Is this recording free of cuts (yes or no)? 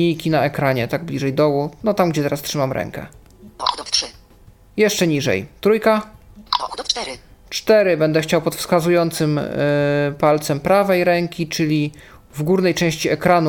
yes